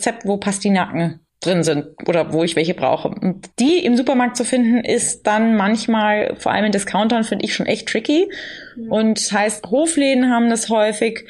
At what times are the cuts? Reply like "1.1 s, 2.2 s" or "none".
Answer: 1.3 s, 3.5 s